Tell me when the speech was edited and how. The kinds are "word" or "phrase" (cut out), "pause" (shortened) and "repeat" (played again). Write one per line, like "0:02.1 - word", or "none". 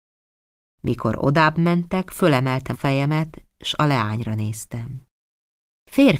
0:02.7 - word